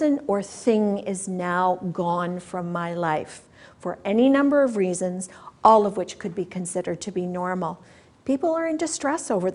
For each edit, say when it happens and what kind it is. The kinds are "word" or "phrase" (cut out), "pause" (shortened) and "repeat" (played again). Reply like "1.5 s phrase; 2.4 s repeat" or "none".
none